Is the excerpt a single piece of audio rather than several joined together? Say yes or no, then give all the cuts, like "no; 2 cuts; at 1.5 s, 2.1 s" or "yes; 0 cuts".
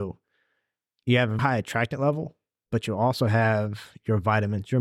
no; 1 cut; at 1.4 s